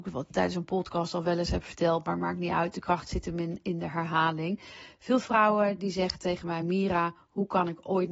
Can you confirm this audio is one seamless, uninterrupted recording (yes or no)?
yes